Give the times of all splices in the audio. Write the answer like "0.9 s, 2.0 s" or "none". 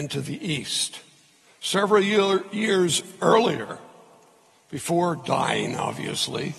none

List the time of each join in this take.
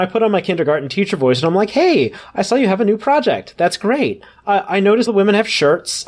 5.1 s

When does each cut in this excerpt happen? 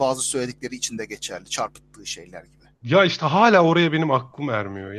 2.7 s

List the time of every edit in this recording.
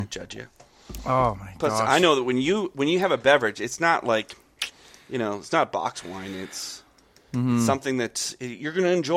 none

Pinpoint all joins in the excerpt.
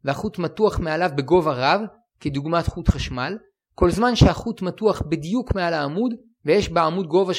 none

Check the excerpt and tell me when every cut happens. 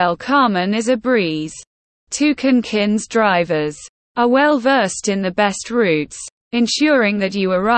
none

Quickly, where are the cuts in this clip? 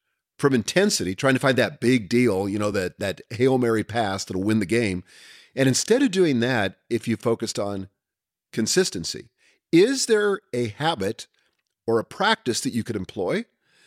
none

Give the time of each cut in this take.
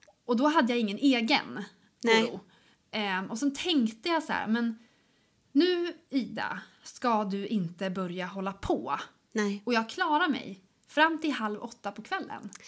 none

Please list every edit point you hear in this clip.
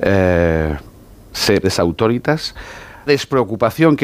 1.6 s, 3.1 s

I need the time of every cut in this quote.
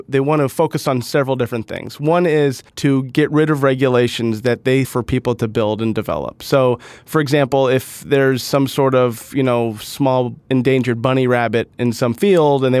2.7 s, 4.8 s, 10.4 s

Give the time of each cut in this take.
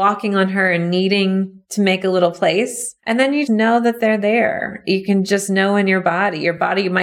3.0 s, 3.5 s

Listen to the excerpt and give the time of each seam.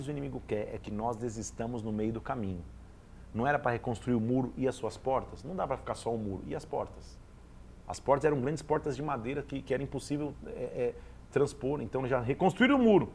9.6 s

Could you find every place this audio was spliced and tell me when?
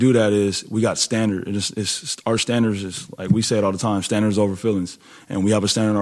none

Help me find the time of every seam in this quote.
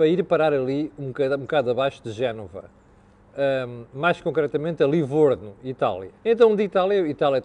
6.2 s

